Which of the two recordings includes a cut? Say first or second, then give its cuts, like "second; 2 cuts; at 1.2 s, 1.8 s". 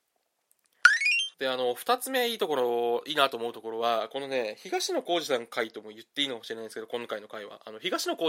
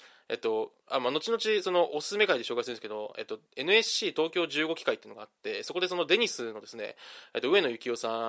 first; 1 cut; at 1.3 s